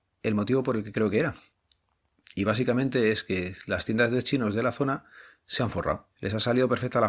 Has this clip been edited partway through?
yes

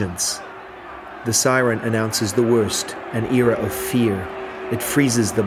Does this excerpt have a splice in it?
no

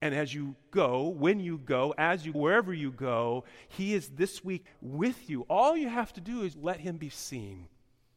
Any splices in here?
yes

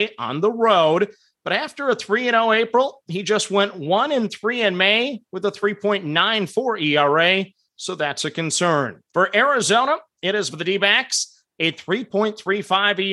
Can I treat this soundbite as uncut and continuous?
no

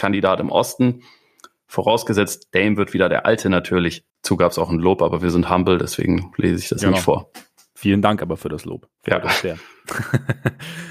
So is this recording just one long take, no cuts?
no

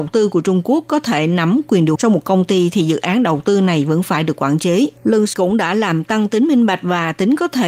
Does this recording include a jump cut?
yes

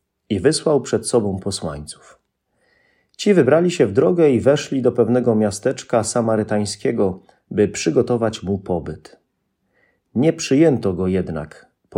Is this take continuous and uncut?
yes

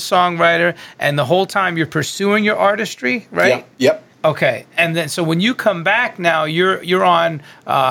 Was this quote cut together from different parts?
yes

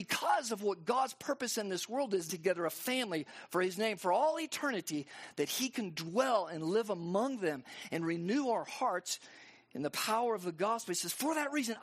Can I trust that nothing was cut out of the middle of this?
no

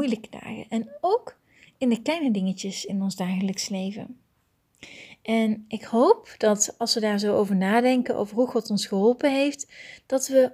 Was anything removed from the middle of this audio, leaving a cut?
no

